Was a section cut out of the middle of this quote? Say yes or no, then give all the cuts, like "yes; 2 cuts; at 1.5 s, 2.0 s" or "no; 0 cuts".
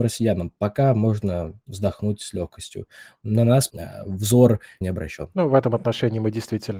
yes; 2 cuts; at 3.7 s, 4.8 s